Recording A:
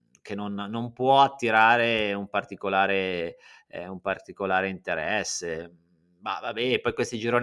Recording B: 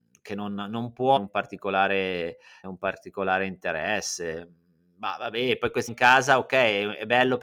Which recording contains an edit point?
B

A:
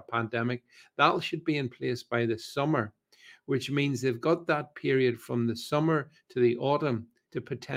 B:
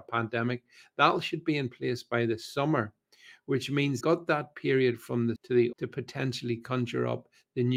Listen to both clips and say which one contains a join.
B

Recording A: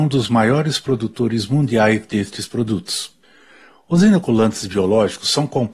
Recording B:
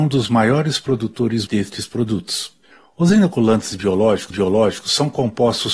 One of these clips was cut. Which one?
B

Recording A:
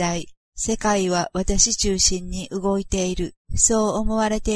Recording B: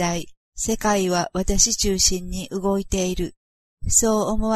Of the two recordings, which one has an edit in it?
A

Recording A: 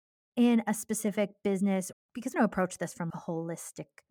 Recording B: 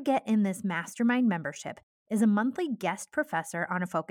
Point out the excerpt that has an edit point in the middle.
A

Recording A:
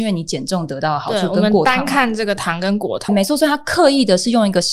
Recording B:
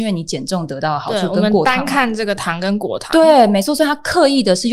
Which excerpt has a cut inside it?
A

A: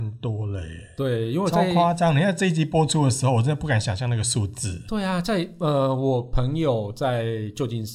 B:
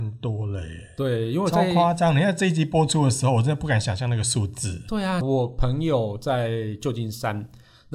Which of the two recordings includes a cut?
B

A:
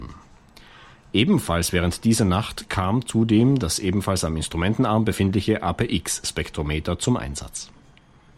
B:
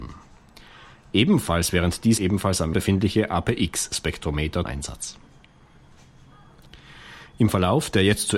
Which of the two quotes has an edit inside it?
B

